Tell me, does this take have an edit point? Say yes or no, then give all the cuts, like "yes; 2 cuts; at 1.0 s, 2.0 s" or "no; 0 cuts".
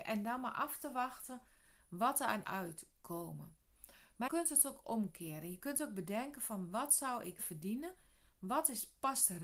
yes; 3 cuts; at 2.4 s, 4.3 s, 7.4 s